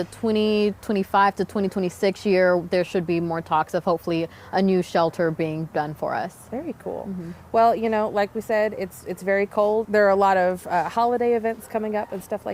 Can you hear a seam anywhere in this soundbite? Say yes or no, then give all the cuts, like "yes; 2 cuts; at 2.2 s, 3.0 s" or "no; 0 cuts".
no; 0 cuts